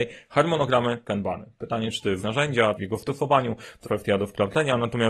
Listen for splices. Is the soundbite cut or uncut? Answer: cut